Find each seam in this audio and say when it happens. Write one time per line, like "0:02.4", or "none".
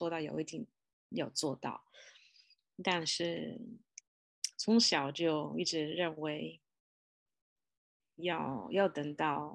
none